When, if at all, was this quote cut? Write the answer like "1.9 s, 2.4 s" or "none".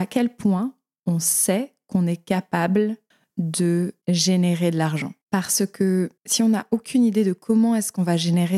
3.1 s, 5.2 s, 6.2 s